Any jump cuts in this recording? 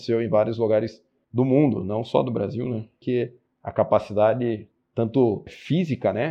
no; 0 cuts

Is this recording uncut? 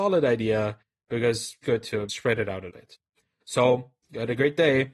no; 4 cuts; at 1.6 s, 2.1 s, 2.7 s, 4.0 s

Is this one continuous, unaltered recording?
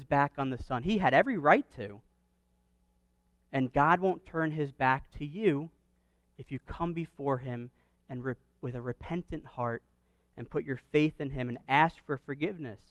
yes; 0 cuts

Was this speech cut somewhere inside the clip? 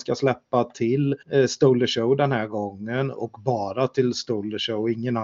yes; 1 cut; at 1.2 s

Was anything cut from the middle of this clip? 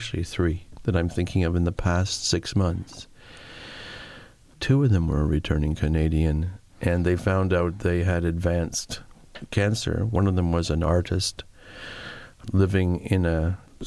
no; 0 cuts

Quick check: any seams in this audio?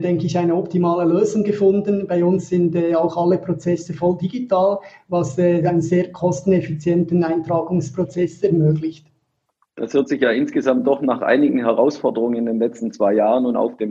no; 0 cuts

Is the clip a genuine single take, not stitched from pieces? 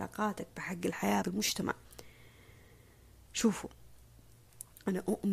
no; 1 cut; at 1.2 s

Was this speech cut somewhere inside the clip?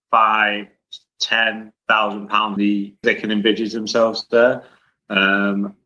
yes; 3 cuts; at 1.8 s, 2.6 s, 3.0 s

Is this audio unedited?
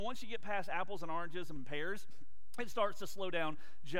no; 1 cut; at 1.6 s

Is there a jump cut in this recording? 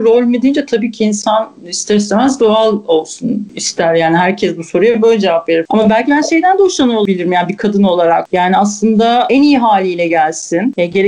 no; 0 cuts

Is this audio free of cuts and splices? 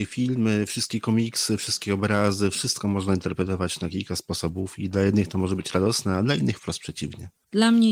yes; 0 cuts

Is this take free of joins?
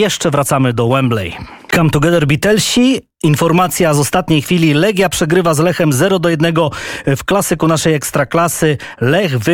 yes; 0 cuts

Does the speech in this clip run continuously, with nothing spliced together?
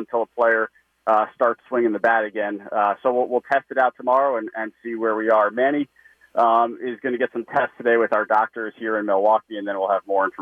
yes; 0 cuts

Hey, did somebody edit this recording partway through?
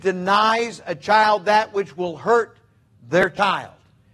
no; 0 cuts

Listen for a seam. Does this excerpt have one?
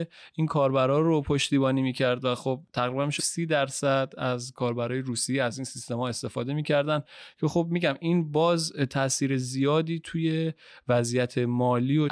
yes; 1 cut; at 3.2 s

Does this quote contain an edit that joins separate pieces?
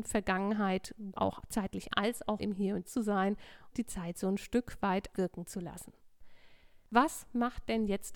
yes; 6 cuts; at 1.1 s, 1.9 s, 2.4 s, 2.9 s, 3.7 s, 5.1 s

